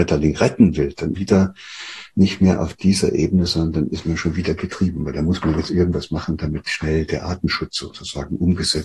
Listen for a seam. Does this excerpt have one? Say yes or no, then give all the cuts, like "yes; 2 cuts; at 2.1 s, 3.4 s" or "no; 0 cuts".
yes; 1 cut; at 1.1 s